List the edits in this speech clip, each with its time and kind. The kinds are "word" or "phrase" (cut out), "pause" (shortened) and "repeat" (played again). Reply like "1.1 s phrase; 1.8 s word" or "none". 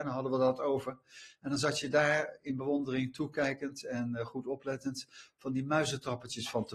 none